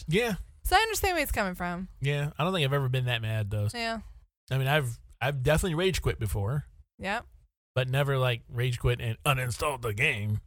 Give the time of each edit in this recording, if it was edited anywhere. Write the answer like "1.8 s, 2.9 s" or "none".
3.7 s